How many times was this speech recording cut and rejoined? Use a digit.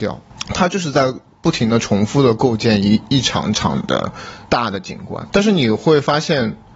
1